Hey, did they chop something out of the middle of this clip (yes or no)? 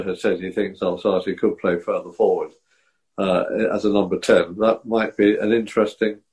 no